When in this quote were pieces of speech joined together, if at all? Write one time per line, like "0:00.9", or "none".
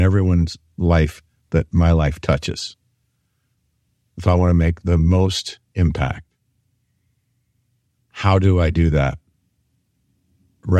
none